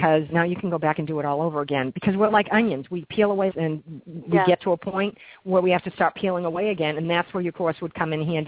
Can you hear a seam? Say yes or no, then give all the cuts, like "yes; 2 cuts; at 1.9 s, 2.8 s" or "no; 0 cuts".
yes; 1 cut; at 3.5 s